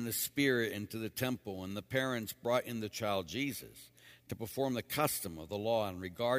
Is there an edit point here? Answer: no; 0 cuts

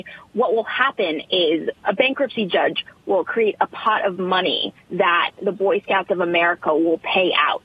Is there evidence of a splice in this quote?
no; 0 cuts

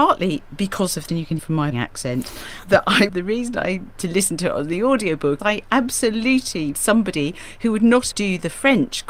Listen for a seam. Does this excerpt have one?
yes; 9 cuts; at 1.1 s, 1.4 s, 1.7 s, 2.6 s, 3.1 s, 3.9 s, 5.4 s, 6.7 s, 8.1 s

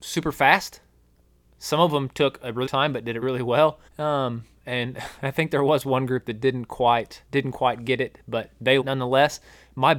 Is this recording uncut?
no; 5 cuts; at 2.7 s, 3.2 s, 3.9 s, 7.3 s, 8.8 s

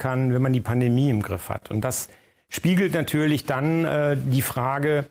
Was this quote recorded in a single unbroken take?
yes; 0 cuts

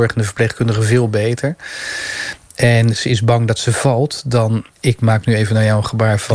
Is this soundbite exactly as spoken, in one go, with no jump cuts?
no; 1 cut; at 4.7 s

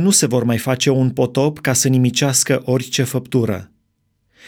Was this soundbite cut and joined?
no; 0 cuts

